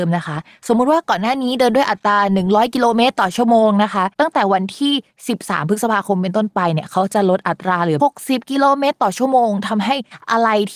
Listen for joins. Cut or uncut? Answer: cut